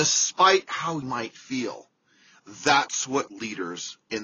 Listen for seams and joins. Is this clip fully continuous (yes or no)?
no